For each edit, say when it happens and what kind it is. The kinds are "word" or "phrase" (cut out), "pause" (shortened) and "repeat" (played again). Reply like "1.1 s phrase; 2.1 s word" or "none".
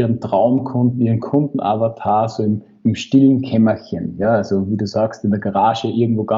none